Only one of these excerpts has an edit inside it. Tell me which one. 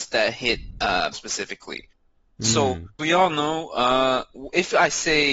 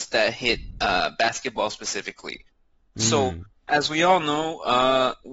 first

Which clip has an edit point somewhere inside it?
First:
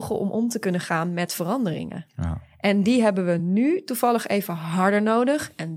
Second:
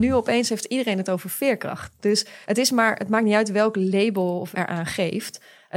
second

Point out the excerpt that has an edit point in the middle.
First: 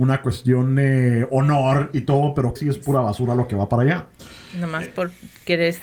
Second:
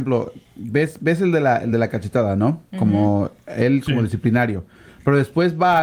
first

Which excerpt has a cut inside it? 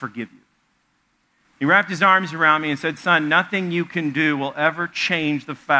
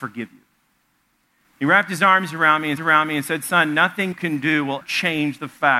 second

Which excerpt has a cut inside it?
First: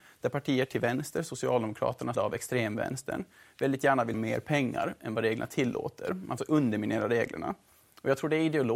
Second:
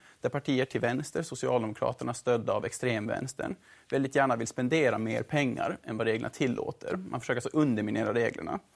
first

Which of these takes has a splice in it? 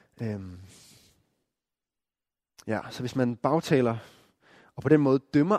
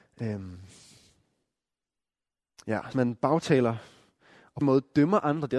second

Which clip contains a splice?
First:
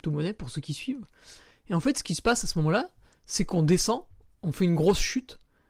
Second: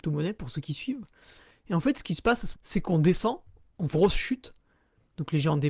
second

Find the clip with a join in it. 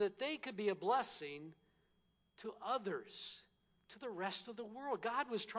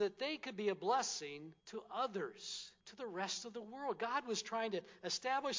second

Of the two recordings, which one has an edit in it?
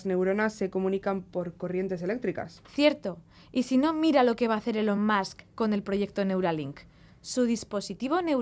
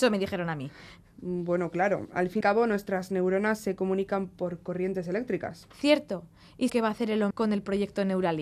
second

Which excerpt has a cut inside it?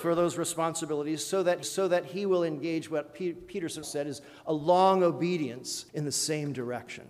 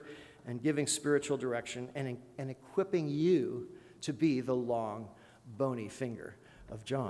first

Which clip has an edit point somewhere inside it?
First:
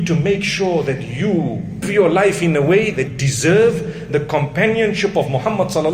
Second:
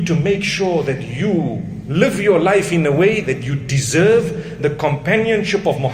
first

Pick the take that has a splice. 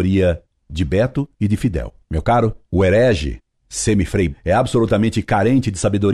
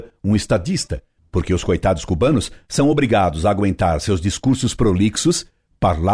first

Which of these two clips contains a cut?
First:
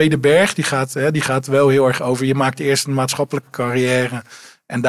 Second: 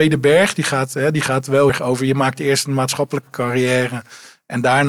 second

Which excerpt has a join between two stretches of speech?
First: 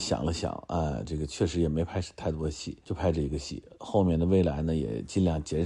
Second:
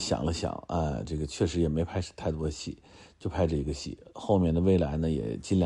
first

